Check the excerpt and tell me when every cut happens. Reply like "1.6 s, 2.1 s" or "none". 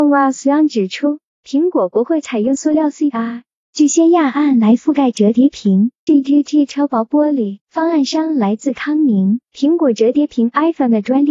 3.1 s, 6.1 s, 7.6 s, 9.5 s